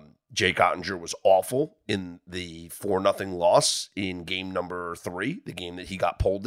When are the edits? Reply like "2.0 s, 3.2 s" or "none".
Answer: none